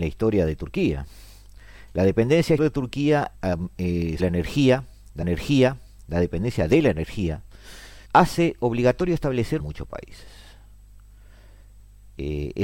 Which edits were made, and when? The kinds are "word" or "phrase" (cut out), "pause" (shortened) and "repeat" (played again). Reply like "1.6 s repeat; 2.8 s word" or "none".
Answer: 2.6 s word; 3.3 s word; 4.2 s word; 5.2 s repeat; 8.0 s pause; 9.6 s phrase